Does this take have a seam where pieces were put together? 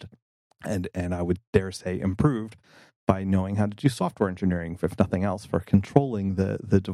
yes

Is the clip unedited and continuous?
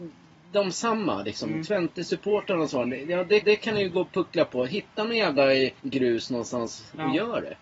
no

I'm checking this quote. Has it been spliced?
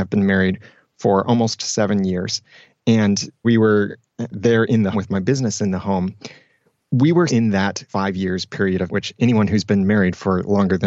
yes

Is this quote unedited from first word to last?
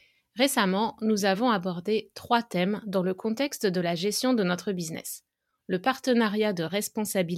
yes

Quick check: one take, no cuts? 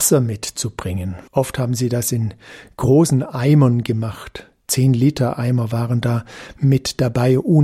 no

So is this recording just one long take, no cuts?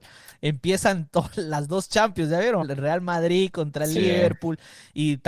no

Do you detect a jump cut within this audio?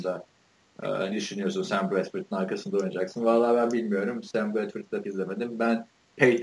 yes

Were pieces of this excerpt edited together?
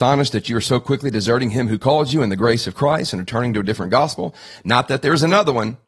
no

